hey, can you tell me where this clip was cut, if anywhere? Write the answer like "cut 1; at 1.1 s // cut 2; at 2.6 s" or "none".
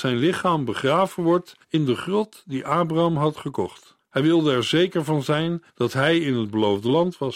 cut 1; at 1.6 s // cut 2; at 4.0 s // cut 3; at 5.7 s